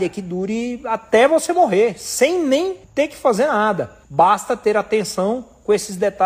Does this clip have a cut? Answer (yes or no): yes